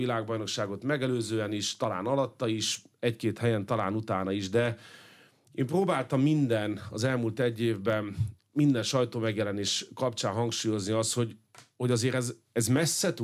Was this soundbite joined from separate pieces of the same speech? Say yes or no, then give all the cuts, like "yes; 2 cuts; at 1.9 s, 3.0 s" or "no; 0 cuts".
no; 0 cuts